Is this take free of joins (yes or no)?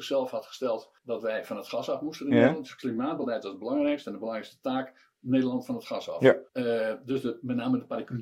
no